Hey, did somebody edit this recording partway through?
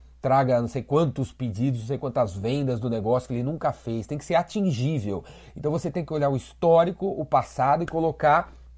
no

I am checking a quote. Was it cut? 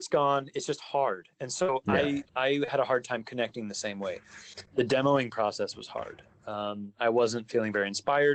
yes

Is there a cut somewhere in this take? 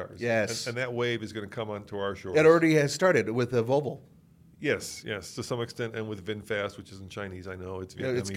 no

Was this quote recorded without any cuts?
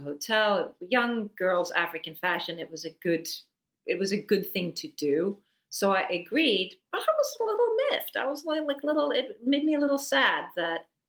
yes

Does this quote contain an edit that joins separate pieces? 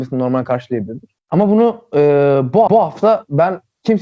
yes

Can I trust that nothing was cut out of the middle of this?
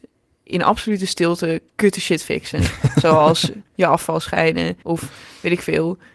no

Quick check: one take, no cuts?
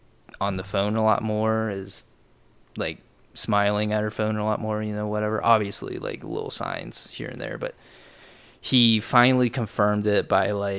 yes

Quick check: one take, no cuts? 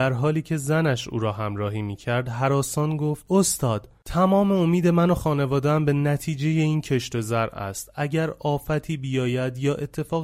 yes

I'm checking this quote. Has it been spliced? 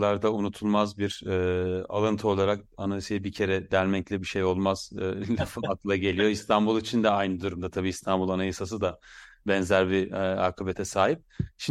no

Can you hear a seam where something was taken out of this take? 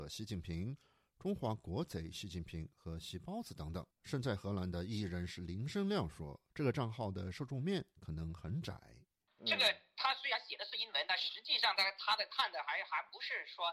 yes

